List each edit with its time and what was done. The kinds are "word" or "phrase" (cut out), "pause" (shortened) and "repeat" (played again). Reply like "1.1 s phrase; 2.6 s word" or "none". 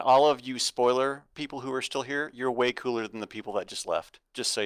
none